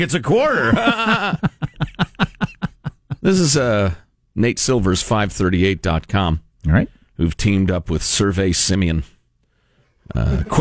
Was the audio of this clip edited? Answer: no; 0 cuts

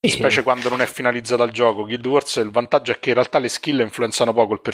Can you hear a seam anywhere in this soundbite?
no; 0 cuts

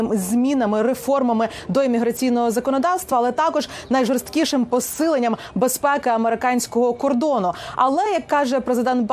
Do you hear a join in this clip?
no; 0 cuts

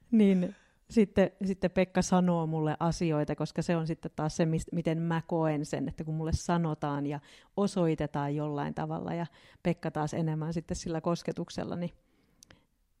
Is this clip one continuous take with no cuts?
yes; 0 cuts

